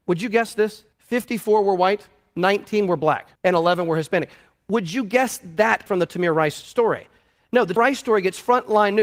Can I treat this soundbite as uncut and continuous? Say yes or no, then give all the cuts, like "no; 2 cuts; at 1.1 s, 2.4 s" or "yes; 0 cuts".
no; 4 cuts; at 0.9 s, 3.4 s, 5.9 s, 7.8 s